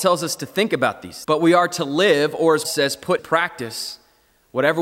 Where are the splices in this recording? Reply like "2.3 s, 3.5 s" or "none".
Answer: 1.2 s, 2.6 s, 3.2 s